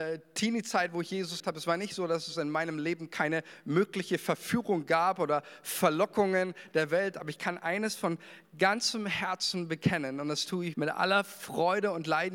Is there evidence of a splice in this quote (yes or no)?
yes